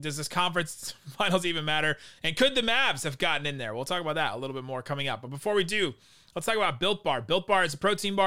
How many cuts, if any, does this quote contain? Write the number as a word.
zero